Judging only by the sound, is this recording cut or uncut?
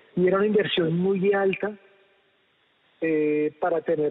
uncut